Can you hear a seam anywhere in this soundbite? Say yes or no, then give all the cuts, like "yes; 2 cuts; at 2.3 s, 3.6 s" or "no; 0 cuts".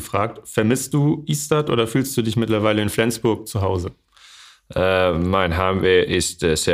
no; 0 cuts